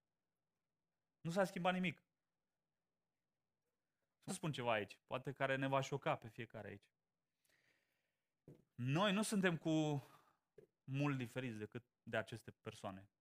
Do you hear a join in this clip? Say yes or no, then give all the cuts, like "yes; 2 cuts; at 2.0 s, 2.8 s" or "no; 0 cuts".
yes; 2 cuts; at 4.3 s, 11.9 s